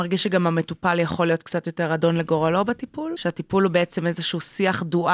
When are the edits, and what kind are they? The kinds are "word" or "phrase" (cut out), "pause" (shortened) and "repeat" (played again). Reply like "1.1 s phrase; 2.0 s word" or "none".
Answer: none